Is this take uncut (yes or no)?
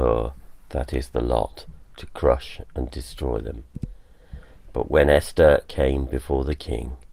yes